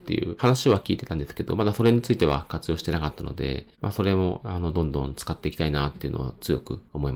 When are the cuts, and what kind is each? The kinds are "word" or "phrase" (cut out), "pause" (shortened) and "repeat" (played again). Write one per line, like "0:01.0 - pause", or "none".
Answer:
0:03.7 - pause